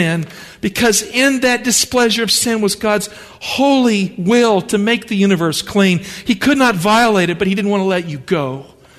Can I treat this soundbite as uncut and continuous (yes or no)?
yes